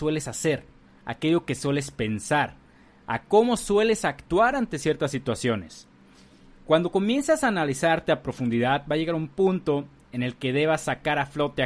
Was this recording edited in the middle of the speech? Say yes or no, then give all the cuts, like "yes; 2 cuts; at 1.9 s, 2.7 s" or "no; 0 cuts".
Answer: no; 0 cuts